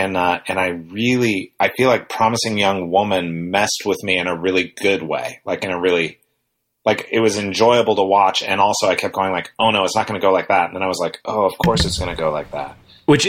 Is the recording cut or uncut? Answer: uncut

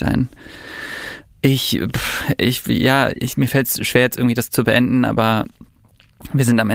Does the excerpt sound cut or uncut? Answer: uncut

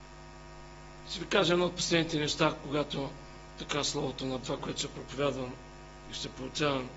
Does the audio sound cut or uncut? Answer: cut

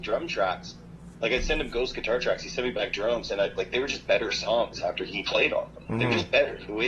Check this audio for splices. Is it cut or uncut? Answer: uncut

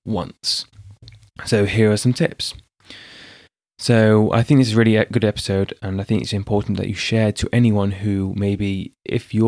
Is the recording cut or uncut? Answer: uncut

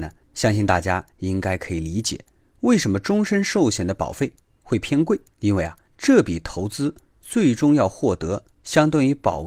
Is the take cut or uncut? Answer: uncut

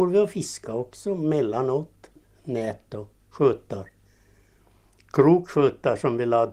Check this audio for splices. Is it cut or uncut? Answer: uncut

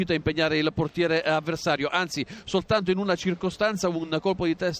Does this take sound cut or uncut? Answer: uncut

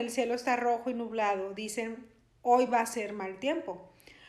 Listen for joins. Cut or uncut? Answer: uncut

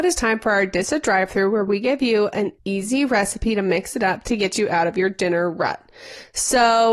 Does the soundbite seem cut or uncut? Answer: cut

